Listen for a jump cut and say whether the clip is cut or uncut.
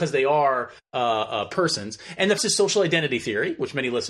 cut